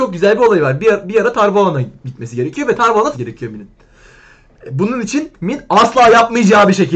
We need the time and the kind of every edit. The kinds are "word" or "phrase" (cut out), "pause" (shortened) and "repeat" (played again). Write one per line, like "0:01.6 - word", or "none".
0:03.1 - word